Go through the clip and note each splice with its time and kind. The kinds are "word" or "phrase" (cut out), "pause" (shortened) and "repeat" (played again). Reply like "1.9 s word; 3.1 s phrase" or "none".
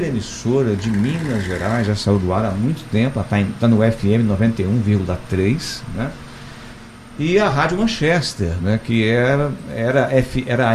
none

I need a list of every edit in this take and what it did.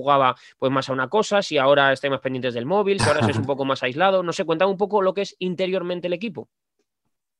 none

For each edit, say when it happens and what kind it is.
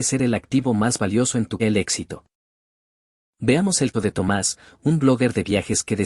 1.6 s phrase; 3.9 s word

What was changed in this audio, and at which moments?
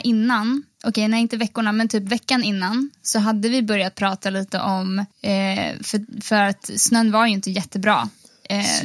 5.1 s pause

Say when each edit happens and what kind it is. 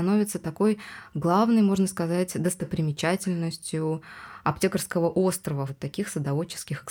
5.7 s phrase

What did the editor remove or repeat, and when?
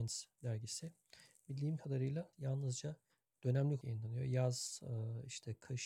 2.3 s word; 3.8 s word

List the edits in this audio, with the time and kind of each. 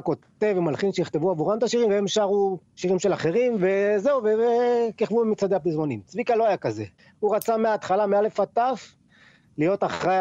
none

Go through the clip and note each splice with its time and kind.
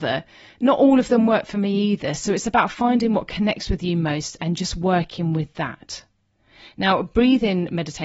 none

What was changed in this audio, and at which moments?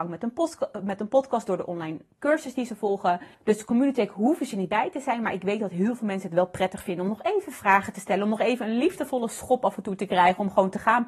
3.3 s pause

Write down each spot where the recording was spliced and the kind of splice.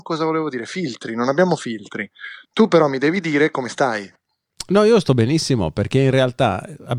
2.4 s pause

